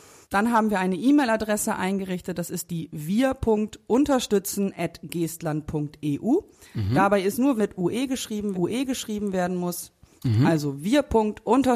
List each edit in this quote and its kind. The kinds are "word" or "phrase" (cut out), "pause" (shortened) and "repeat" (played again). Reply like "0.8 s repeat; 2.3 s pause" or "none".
7.6 s phrase; 8.5 s repeat